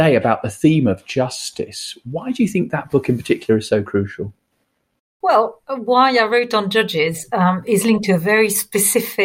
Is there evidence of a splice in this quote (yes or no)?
no